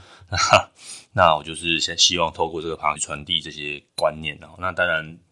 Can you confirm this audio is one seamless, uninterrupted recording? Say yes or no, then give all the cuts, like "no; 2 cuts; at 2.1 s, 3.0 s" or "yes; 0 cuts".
no; 2 cuts; at 3.0 s, 3.9 s